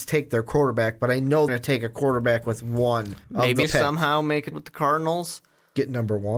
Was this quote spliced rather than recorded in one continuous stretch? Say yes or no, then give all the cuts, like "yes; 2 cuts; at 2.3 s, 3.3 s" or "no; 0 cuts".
yes; 4 cuts; at 1.5 s, 3.2 s, 3.6 s, 4.5 s